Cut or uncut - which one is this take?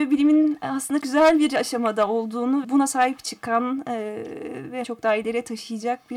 cut